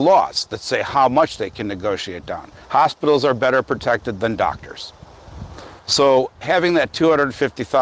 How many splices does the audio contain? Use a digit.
1